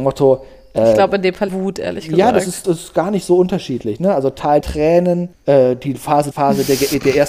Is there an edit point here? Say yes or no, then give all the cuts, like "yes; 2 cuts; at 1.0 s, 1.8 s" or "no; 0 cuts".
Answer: yes; 5 cuts; at 1.5 s, 2.6 s, 4.6 s, 5.3 s, 6.3 s